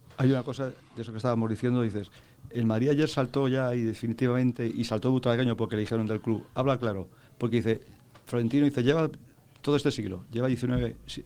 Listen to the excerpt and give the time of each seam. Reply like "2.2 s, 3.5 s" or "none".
none